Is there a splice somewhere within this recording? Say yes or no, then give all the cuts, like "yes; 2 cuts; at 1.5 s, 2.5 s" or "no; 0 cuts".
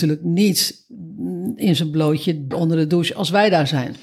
yes; 1 cut; at 2.5 s